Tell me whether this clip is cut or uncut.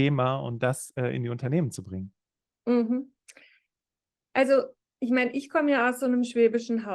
uncut